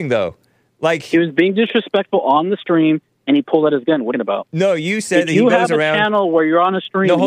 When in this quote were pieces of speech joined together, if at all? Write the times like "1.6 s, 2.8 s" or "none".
4.1 s